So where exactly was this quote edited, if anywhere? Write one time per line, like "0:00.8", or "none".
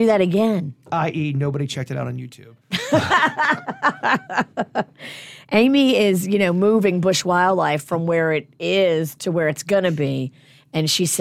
none

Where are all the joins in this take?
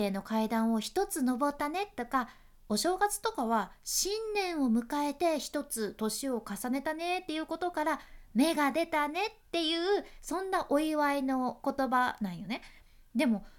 none

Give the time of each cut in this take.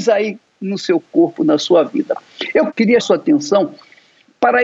0:03.0

